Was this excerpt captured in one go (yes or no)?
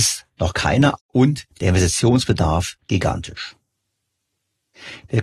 no